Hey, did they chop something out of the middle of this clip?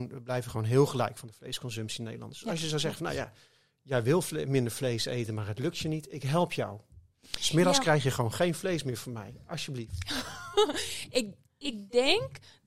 no; 0 cuts

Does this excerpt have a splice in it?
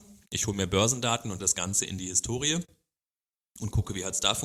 yes; 1 cut; at 1.4 s

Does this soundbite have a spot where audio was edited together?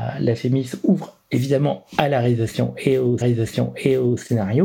yes; 2 cuts; at 1.2 s, 3.2 s

